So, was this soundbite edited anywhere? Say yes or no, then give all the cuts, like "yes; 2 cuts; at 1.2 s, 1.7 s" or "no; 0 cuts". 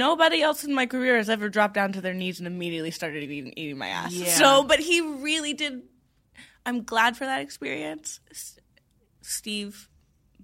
no; 0 cuts